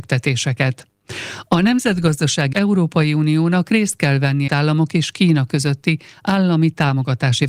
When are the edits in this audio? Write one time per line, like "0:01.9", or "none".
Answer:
0:02.5
0:04.5

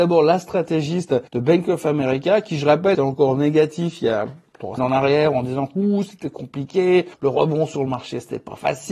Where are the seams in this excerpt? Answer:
0:01.3
0:02.9
0:04.8
0:07.1

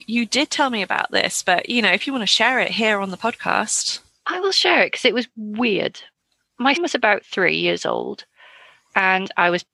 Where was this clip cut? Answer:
0:06.8

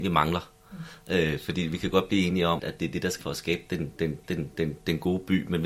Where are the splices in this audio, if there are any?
0:02.6
0:03.2
0:04.2

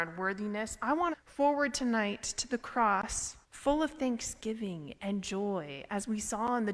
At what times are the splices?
0:01.1
0:03.4

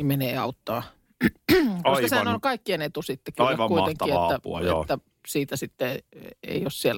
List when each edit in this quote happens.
none

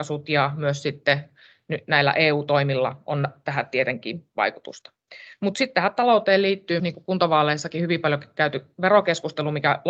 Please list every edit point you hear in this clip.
0:06.8

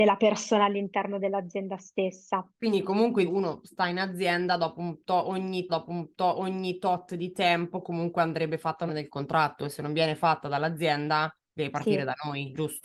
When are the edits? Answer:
0:02.5
0:03.3
0:05.7
0:08.9
0:11.4

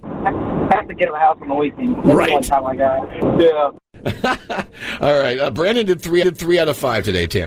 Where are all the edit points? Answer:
0:01.1
0:06.2

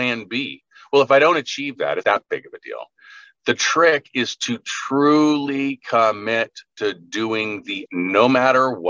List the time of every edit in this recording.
0:02.0
0:07.9

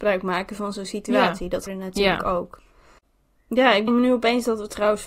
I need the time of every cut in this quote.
0:01.7
0:03.9

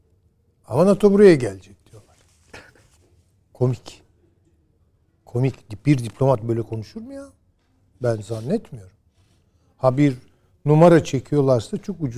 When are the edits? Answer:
none

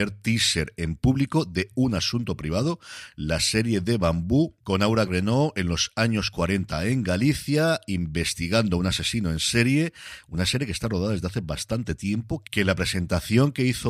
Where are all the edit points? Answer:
0:05.1

